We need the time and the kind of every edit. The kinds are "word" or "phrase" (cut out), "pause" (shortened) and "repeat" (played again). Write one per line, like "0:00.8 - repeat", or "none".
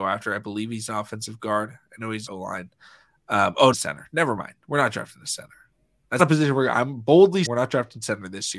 0:02.3 - phrase
0:03.7 - phrase
0:06.2 - word
0:07.5 - word